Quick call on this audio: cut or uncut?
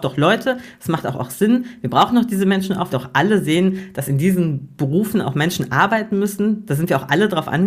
cut